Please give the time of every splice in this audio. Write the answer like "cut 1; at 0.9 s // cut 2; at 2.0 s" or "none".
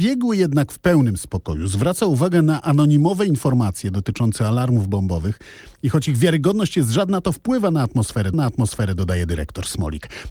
cut 1; at 8.3 s